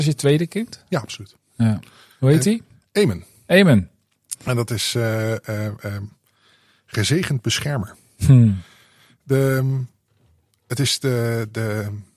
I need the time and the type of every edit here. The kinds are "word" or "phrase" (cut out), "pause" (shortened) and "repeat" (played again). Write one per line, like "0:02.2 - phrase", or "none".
none